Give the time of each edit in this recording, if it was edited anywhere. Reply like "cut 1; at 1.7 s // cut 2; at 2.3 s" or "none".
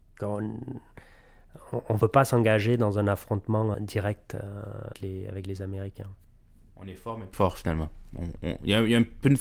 cut 1; at 3.7 s // cut 2; at 4.9 s // cut 3; at 7.3 s